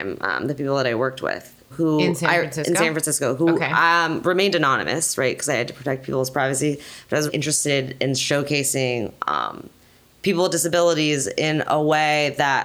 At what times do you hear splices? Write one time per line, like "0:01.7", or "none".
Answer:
0:01.7
0:07.3